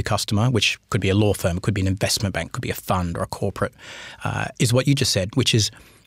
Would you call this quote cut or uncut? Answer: uncut